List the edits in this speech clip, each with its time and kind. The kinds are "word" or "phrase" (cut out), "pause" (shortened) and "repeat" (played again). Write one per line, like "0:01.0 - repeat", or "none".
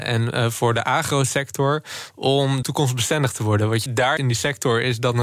0:02.6 - word
0:03.9 - word
0:04.2 - word